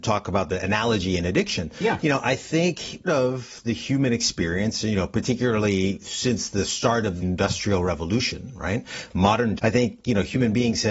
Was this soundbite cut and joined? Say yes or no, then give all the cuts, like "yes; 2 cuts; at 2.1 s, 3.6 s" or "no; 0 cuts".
yes; 3 cuts; at 3.1 s, 7.2 s, 9.6 s